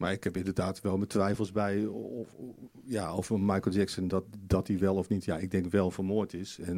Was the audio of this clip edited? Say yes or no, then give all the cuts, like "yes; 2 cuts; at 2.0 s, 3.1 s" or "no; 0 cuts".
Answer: no; 0 cuts